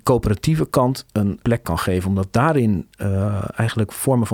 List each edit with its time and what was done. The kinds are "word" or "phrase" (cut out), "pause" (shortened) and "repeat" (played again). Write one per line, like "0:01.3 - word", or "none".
0:01.4 - word